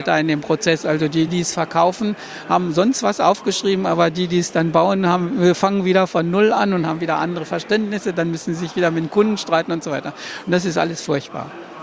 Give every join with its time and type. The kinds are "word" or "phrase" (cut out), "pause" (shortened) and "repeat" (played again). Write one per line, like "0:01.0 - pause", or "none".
0:01.3 - word